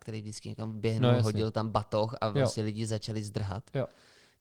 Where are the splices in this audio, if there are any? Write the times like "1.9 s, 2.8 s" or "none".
none